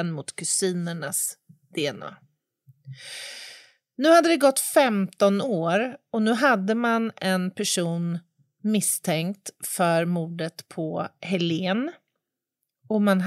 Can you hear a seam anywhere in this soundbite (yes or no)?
no